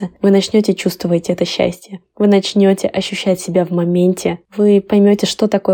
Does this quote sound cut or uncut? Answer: uncut